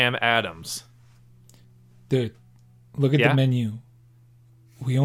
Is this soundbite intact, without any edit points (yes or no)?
yes